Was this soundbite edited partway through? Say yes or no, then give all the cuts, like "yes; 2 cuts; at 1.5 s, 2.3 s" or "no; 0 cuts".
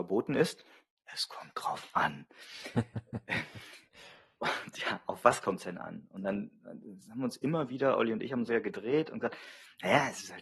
yes; 1 cut; at 8.5 s